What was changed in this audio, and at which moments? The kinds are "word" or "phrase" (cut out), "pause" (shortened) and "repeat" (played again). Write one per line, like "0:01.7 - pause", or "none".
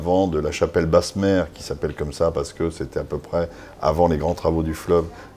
none